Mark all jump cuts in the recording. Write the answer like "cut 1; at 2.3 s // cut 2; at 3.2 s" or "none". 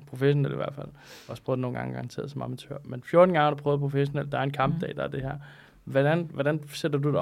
none

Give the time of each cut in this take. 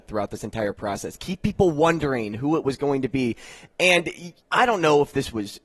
cut 1; at 4.4 s

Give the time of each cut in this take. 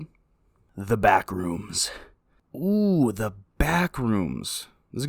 none

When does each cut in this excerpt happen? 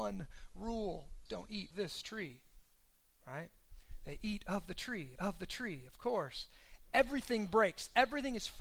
cut 1; at 1.3 s // cut 2; at 1.7 s // cut 3; at 5.2 s

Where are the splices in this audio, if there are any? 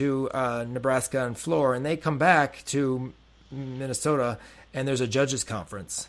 none

